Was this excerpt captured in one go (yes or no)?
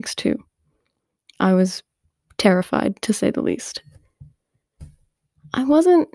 yes